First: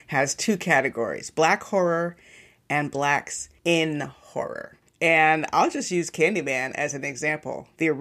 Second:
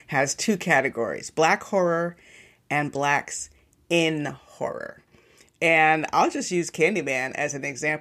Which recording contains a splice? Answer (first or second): first